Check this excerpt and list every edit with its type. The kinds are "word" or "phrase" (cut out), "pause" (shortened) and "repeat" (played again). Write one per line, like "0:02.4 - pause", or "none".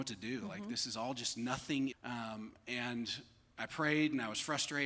0:01.9 - phrase